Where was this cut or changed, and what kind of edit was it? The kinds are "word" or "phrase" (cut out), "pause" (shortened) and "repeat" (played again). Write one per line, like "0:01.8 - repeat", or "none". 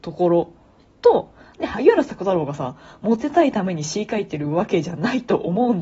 none